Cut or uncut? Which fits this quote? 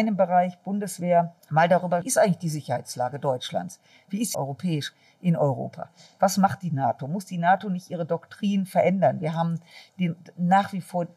cut